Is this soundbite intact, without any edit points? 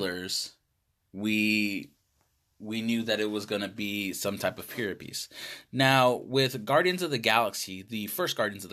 yes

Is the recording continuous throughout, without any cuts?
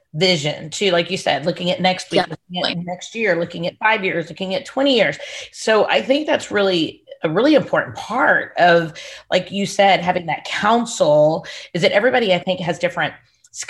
yes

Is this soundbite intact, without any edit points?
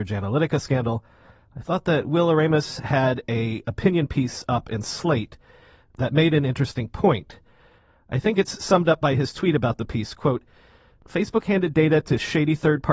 yes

